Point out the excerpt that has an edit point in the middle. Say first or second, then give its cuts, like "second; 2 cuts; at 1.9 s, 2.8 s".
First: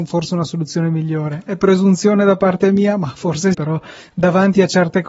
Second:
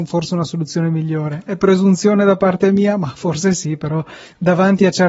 first; 1 cut; at 3.5 s